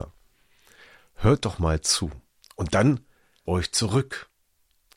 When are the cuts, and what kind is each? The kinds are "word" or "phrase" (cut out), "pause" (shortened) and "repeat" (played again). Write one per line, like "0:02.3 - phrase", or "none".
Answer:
0:02.4 - pause
0:03.5 - word